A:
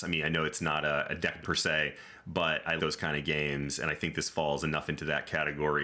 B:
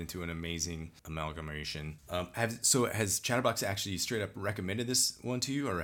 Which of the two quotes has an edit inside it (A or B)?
A